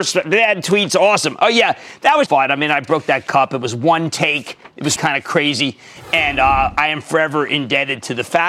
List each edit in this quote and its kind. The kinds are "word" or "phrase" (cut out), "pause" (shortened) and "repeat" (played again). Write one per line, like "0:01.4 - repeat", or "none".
0:02.3 - word
0:05.0 - word